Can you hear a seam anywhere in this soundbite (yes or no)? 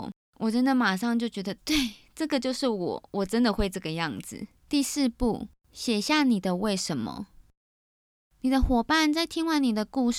yes